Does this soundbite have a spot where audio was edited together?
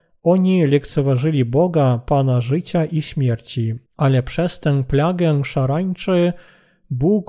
yes; 1 cut; at 3.9 s

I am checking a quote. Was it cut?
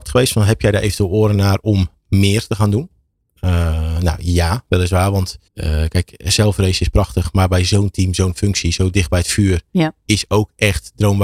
yes; 1 cut; at 5.5 s

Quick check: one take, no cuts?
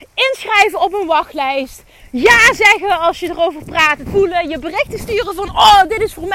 no; 1 cut; at 4.1 s

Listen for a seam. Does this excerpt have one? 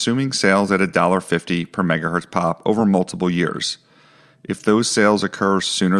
no; 0 cuts

